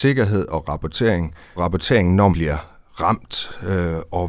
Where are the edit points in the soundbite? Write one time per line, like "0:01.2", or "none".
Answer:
0:01.6
0:02.3